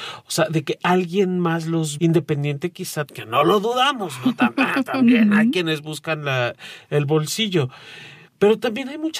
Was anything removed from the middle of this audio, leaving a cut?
yes; 2 cuts; at 2.0 s, 3.1 s

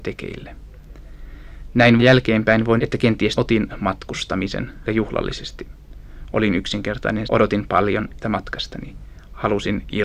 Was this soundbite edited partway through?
yes; 6 cuts; at 2.0 s, 2.8 s, 3.3 s, 4.8 s, 7.2 s, 8.2 s

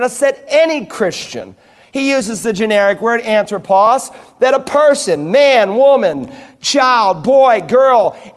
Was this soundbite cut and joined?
no; 0 cuts

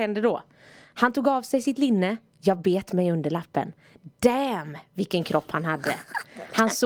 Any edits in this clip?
no; 0 cuts

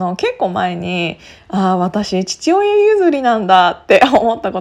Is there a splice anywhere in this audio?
no; 0 cuts

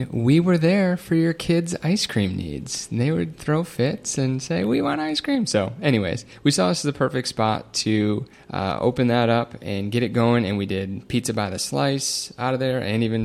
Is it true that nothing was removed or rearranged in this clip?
no; 1 cut; at 8.3 s

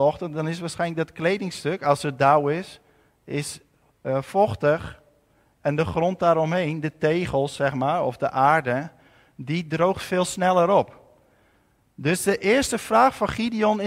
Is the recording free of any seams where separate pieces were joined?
yes; 0 cuts

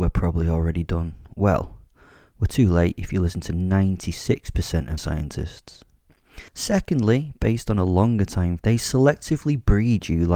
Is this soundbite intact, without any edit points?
no; 3 cuts; at 5.0 s, 6.5 s, 8.6 s

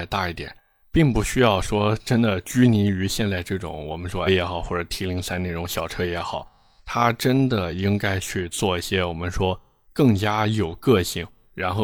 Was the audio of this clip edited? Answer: yes; 1 cut; at 4.3 s

